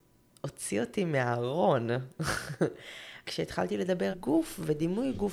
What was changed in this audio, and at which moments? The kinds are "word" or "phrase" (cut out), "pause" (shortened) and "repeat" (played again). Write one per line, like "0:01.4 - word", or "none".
0:03.2 - word
0:04.1 - word